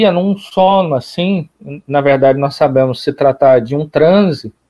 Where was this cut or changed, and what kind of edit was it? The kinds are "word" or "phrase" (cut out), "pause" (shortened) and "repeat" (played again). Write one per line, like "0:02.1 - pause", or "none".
none

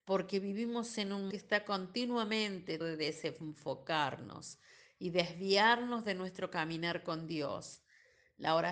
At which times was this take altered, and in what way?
0:01.3 - word
0:02.8 - word

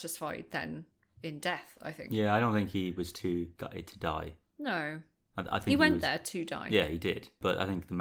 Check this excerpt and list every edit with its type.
none

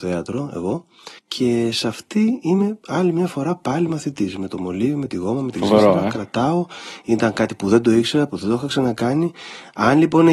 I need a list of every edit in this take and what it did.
0:01.2 - pause

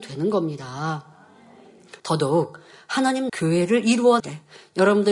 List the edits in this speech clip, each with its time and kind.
0:02.0 - pause
0:03.3 - phrase
0:04.2 - word

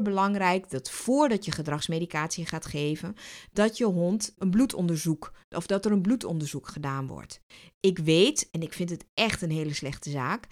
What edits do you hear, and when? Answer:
0:04.4 - word

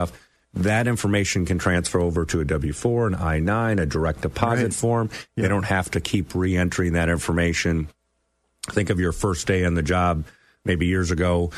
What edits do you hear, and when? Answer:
none

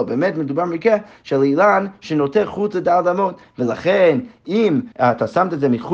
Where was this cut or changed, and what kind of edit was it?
0:04.9 - pause

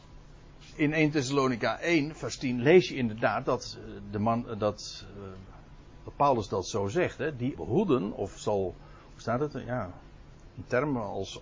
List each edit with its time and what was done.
0:07.6 - phrase

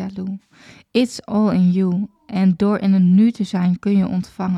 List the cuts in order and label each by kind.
none

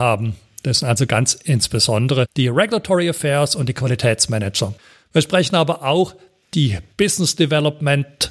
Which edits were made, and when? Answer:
none

